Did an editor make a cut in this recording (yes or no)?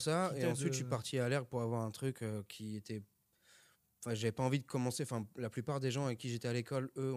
no